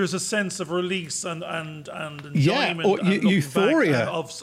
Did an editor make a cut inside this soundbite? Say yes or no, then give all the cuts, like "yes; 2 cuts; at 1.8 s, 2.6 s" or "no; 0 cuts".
no; 0 cuts